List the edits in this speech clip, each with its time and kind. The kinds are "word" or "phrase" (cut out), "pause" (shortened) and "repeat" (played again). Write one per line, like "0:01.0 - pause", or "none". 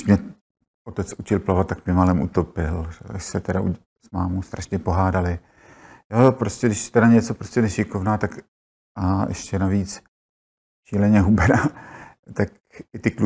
none